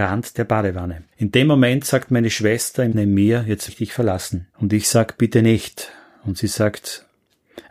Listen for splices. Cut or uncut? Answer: cut